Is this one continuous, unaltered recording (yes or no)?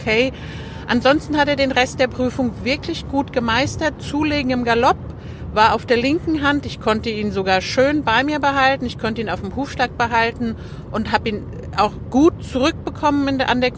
yes